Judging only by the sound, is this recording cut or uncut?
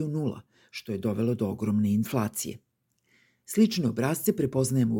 uncut